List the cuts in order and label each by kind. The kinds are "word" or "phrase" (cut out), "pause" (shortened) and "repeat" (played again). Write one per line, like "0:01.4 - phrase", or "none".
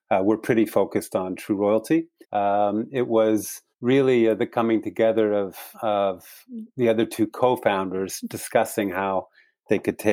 0:02.2 - pause
0:03.7 - pause
0:05.7 - pause